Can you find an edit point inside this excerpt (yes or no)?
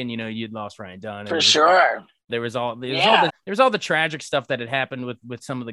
yes